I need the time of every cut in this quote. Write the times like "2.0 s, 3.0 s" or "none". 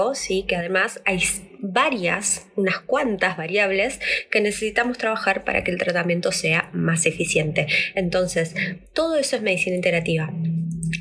none

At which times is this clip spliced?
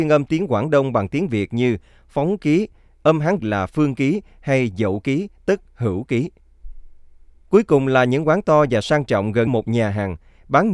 3.4 s, 9.5 s

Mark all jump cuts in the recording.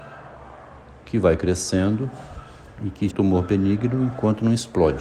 3.1 s

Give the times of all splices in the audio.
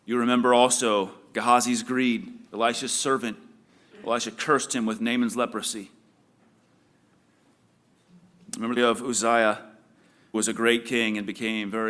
2.5 s, 8.8 s, 10.3 s

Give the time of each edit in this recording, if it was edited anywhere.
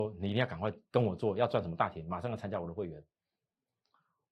none

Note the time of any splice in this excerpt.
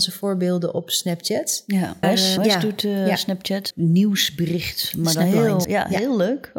2.0 s, 2.4 s, 3.7 s, 5.6 s

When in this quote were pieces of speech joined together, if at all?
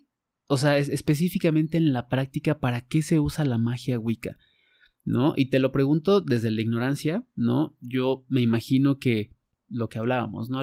none

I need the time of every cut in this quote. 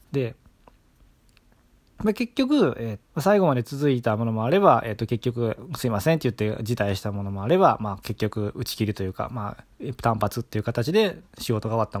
3.0 s

